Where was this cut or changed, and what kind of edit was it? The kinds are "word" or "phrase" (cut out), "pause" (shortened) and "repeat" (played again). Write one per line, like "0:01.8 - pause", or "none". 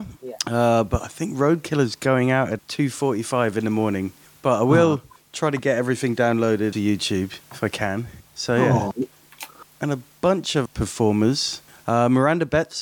0:02.6 - word
0:06.7 - phrase
0:10.7 - word